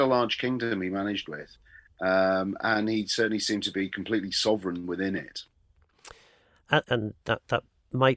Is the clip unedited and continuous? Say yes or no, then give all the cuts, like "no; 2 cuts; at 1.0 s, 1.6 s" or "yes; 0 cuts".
no; 1 cut; at 6.8 s